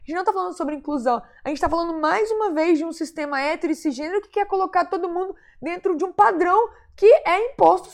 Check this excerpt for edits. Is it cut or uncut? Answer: uncut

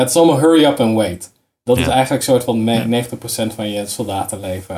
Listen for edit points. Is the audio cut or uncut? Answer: uncut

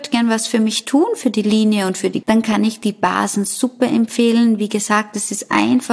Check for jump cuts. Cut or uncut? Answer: cut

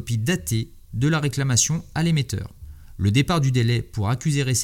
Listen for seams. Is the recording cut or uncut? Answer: uncut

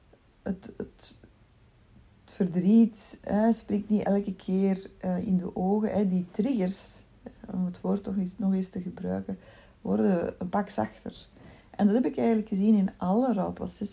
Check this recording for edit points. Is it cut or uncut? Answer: cut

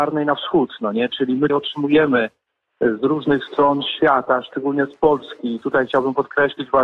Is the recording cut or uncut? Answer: cut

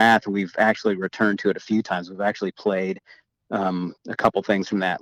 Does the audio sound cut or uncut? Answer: uncut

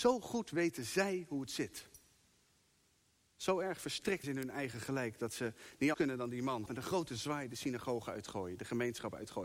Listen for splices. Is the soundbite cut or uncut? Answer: cut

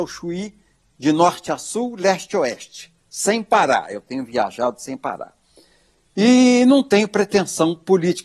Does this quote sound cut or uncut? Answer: uncut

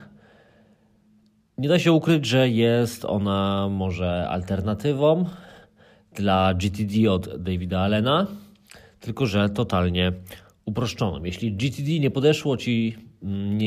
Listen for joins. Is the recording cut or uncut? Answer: uncut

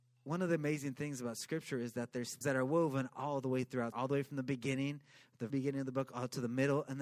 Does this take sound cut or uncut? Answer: cut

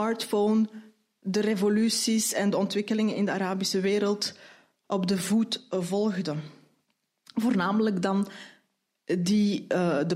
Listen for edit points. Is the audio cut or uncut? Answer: uncut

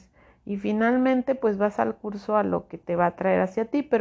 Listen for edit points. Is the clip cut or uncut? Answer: uncut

